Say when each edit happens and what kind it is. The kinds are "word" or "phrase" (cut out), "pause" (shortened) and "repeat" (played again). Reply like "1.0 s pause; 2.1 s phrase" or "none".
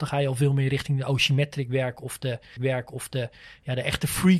2.6 s repeat